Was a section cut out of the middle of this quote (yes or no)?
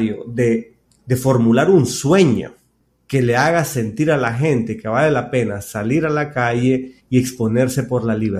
no